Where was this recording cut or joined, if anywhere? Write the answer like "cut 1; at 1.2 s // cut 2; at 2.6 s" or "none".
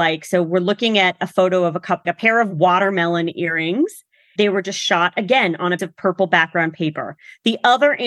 cut 1; at 2.0 s // cut 2; at 4.4 s // cut 3; at 5.8 s